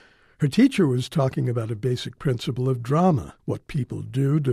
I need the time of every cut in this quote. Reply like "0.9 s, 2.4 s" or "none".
3.4 s